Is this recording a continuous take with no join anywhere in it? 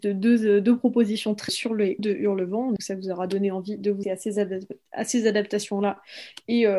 no; 4 cuts; at 1.5 s, 2.0 s, 2.8 s, 4.0 s

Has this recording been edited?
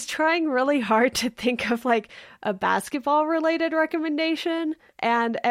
no; 0 cuts

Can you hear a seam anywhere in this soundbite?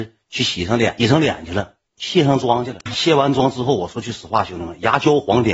yes; 1 cut; at 1.9 s

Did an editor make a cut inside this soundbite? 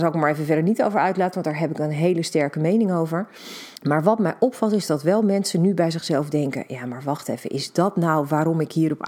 yes; 1 cut; at 3.8 s

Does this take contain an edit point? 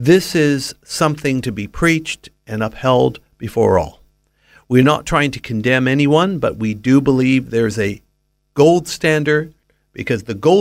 no; 0 cuts

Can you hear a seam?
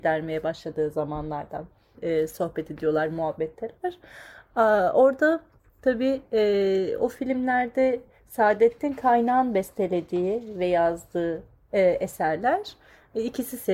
no; 0 cuts

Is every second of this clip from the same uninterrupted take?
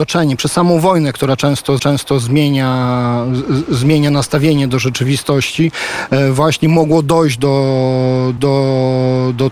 no; 2 cuts; at 1.8 s, 8.4 s

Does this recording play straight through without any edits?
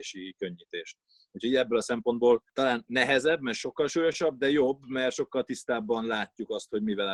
yes; 0 cuts

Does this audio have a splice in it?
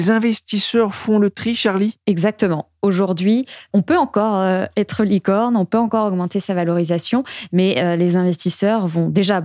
no; 0 cuts

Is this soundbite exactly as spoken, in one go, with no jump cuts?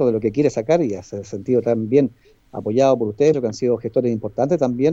no; 1 cut; at 3.3 s

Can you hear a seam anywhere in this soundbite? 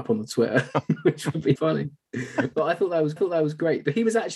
yes; 2 cuts; at 1.6 s, 3.2 s

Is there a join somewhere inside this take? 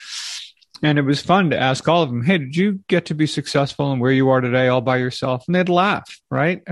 no; 0 cuts

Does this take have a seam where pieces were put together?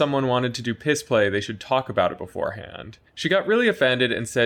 yes; 1 cut; at 3.1 s

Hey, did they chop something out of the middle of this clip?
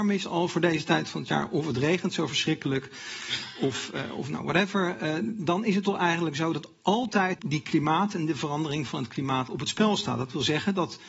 yes; 1 cut; at 7.4 s

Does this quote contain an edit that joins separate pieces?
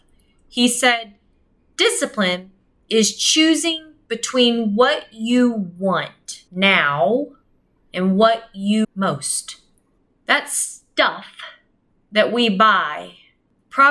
yes; 2 cuts; at 6.5 s, 8.8 s

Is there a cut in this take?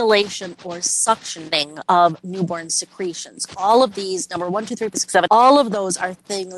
yes; 2 cuts; at 4.9 s, 5.3 s

